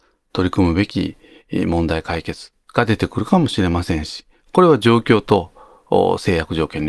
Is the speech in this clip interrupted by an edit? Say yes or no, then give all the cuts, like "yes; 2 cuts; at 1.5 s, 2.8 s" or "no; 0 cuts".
no; 0 cuts